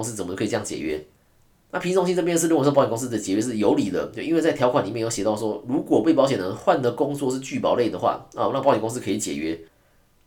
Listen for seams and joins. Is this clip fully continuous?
yes; 0 cuts

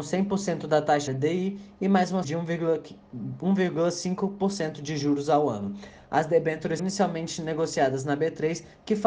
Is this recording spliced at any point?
yes; 3 cuts; at 1.1 s, 2.2 s, 6.8 s

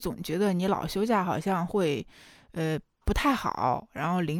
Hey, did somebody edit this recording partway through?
no; 0 cuts

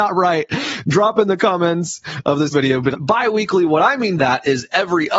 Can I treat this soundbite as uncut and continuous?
no; 3 cuts; at 2.5 s, 2.9 s, 4.2 s

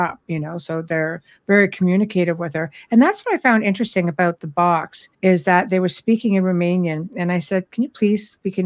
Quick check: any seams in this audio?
yes; 1 cut; at 5.1 s

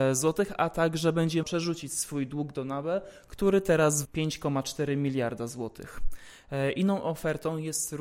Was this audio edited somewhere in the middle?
yes; 2 cuts; at 1.4 s, 4.0 s

